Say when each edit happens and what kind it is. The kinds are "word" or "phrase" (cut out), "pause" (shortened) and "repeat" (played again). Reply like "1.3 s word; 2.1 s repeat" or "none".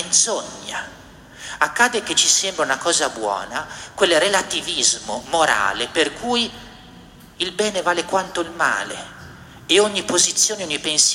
none